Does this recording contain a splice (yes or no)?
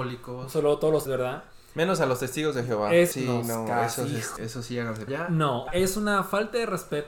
yes